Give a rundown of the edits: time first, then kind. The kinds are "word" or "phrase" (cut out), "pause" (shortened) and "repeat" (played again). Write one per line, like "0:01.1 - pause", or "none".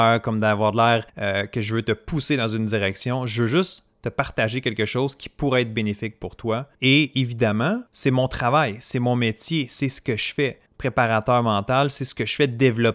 0:01.1 - pause
0:06.7 - pause
0:07.9 - pause
0:10.7 - pause